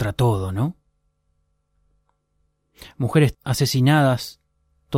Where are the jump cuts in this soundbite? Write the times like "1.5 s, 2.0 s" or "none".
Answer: 3.3 s